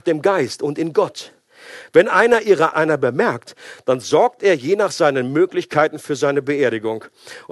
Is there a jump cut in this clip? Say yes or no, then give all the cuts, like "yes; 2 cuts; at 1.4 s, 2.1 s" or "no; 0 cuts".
yes; 1 cut; at 2.7 s